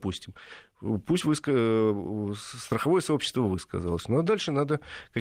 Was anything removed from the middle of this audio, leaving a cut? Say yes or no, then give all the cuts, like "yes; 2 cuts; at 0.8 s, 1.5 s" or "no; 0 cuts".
no; 0 cuts